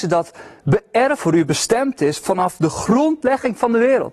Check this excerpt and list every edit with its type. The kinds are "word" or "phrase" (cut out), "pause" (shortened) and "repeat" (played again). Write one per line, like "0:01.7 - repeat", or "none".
0:01.2 - phrase